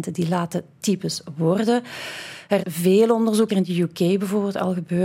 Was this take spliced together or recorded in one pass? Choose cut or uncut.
cut